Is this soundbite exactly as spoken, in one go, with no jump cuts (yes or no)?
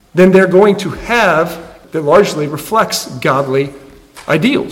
no